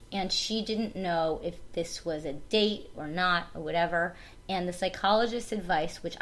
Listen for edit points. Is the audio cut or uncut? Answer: uncut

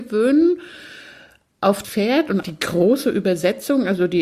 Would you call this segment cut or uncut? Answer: cut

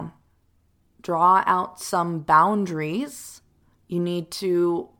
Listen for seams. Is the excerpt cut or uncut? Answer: uncut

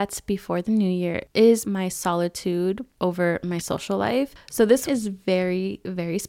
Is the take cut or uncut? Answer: cut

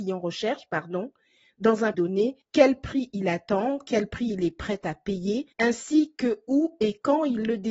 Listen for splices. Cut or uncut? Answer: cut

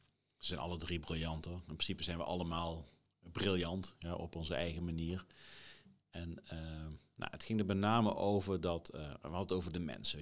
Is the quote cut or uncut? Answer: uncut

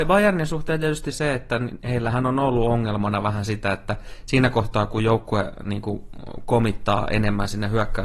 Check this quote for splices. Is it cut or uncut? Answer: cut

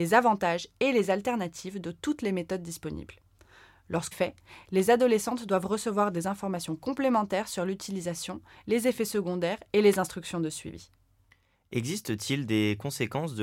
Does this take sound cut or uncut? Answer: cut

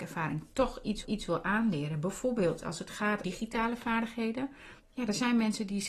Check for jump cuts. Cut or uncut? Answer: cut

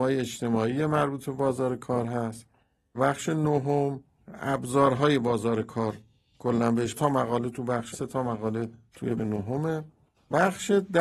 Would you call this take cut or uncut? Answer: cut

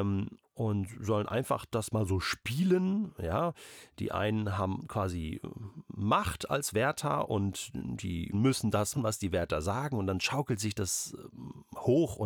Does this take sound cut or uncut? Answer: cut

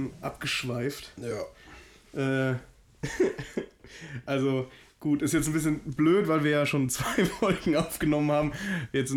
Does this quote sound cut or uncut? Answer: uncut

